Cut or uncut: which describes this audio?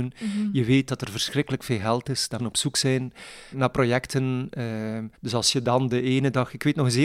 cut